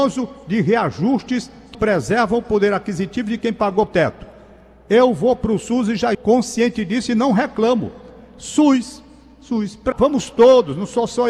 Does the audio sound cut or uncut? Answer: cut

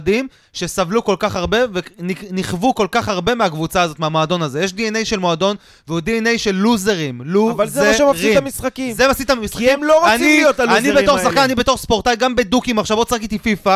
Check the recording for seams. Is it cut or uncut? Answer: uncut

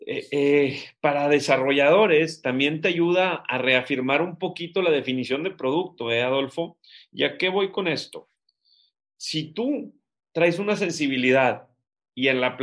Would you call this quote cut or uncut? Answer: uncut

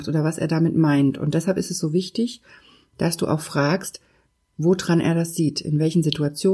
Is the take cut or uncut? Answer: uncut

